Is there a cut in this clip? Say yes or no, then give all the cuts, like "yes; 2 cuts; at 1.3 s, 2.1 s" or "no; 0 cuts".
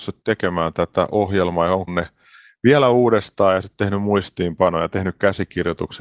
yes; 1 cut; at 1.9 s